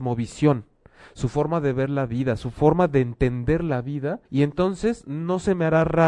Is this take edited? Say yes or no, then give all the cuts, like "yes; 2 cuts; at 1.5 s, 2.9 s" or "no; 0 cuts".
yes; 1 cut; at 4.3 s